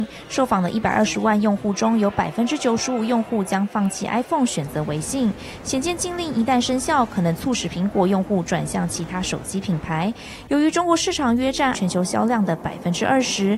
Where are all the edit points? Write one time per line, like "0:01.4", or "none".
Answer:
0:11.7